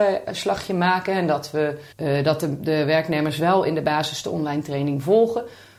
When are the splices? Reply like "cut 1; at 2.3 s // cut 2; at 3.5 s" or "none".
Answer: cut 1; at 1.9 s